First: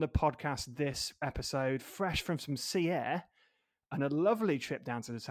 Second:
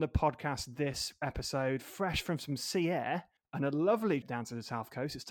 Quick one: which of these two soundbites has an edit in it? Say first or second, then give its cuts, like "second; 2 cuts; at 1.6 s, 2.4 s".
second; 2 cuts; at 3.4 s, 4.2 s